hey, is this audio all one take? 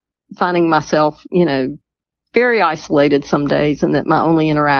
yes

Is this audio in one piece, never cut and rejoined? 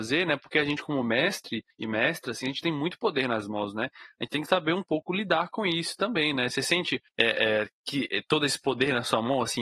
yes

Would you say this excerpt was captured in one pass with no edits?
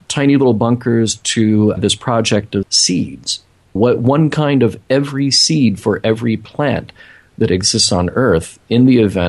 no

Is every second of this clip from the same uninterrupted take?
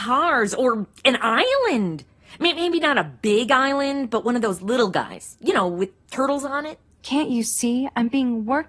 yes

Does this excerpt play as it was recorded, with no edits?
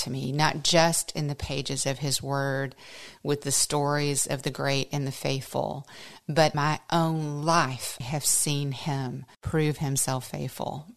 no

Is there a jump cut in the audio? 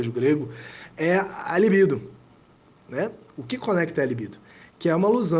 no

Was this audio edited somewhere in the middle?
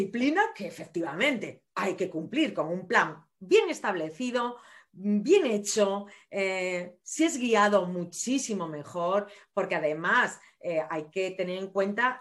no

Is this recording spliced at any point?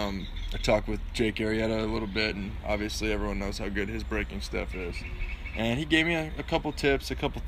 no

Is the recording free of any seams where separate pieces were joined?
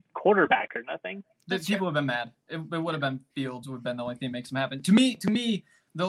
yes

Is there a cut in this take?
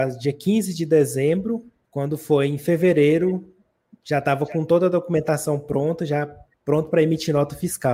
no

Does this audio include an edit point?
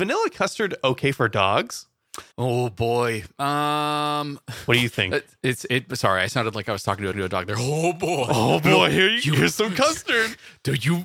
yes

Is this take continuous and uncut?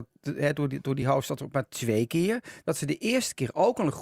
yes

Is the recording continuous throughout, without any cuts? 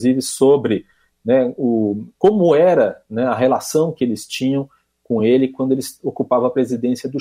yes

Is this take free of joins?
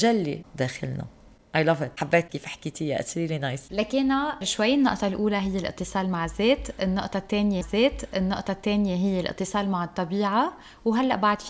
no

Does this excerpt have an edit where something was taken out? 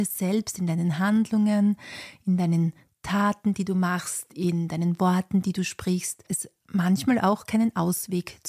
no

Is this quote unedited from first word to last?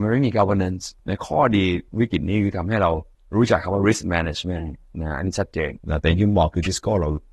no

